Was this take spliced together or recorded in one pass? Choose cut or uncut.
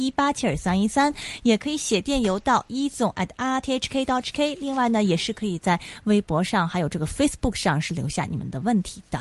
uncut